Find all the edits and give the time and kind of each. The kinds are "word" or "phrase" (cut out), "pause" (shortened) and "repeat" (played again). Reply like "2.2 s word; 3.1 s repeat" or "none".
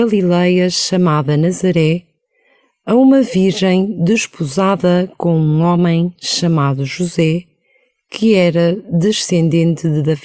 none